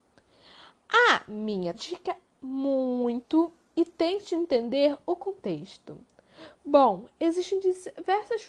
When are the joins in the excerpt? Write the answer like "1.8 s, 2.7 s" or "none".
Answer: 1.7 s, 2.4 s